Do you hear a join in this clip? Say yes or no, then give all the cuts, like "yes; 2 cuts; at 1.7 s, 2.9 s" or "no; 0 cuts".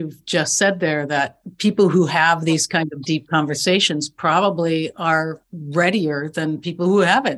no; 0 cuts